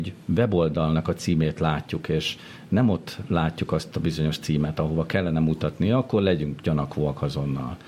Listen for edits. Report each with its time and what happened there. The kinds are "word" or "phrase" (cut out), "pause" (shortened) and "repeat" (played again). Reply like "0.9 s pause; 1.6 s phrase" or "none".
none